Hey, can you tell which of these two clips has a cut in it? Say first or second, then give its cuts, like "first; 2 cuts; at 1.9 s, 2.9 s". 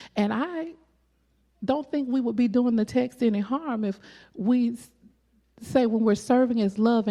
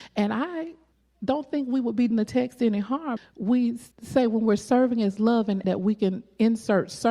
second; 5 cuts; at 0.9 s, 2.1 s, 3.2 s, 3.9 s, 5.6 s